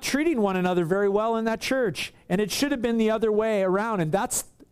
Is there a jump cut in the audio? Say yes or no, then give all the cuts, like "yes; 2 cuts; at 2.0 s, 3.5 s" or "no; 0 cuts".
no; 0 cuts